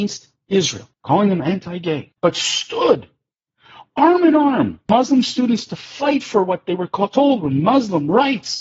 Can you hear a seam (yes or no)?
yes